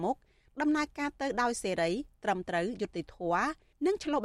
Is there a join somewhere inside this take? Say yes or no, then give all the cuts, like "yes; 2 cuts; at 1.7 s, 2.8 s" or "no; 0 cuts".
no; 0 cuts